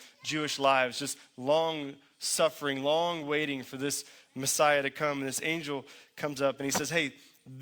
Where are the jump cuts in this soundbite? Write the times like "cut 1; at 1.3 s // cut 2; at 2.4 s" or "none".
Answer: none

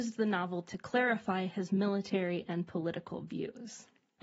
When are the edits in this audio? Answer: none

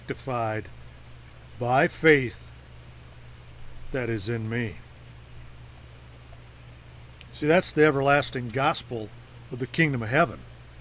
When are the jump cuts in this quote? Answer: none

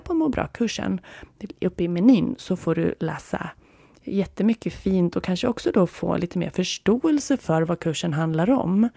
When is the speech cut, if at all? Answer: none

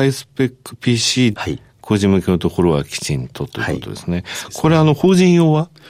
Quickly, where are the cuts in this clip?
cut 1; at 1.3 s

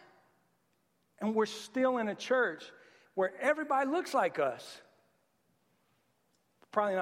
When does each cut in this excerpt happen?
none

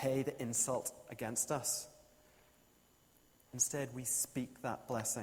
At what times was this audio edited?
none

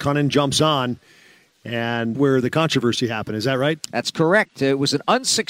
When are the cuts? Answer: cut 1; at 2.1 s

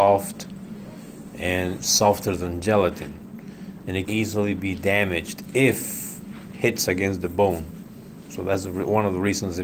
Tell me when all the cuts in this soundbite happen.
cut 1; at 1.8 s // cut 2; at 4.1 s

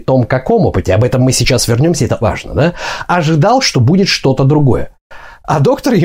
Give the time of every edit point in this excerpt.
cut 1; at 2.2 s

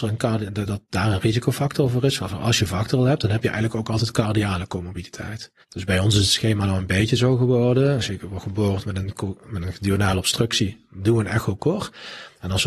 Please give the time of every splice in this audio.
cut 1; at 5.6 s

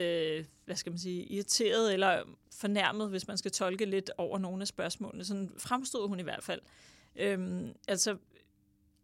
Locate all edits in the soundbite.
cut 1; at 2.4 s // cut 2; at 7.8 s

